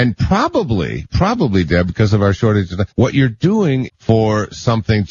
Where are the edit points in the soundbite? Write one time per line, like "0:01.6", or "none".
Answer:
0:02.9
0:03.9